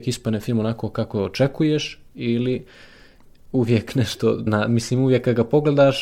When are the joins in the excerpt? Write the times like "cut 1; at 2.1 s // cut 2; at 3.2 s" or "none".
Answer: cut 1; at 4.5 s